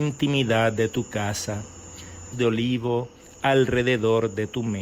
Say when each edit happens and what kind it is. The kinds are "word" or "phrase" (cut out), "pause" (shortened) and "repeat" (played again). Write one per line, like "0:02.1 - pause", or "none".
0:02.3 - phrase

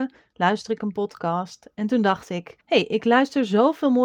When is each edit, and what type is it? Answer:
0:02.6 - pause

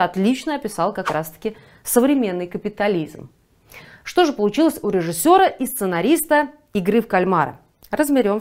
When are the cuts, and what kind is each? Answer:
none

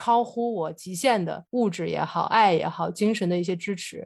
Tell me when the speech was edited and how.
0:01.5 - pause

